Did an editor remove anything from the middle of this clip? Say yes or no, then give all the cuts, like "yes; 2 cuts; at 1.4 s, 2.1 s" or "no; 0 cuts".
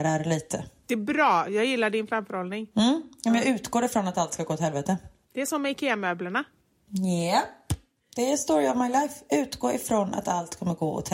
no; 0 cuts